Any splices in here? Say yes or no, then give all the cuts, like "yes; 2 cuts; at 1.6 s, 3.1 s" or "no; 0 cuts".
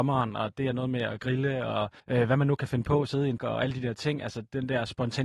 yes; 2 cuts; at 2.0 s, 3.4 s